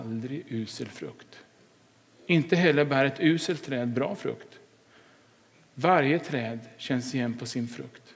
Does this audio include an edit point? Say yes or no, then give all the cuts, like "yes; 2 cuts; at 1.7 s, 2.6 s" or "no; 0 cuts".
no; 0 cuts